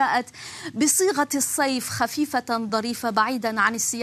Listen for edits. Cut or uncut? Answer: uncut